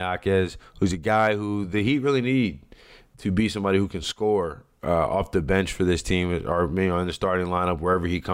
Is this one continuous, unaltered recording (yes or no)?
yes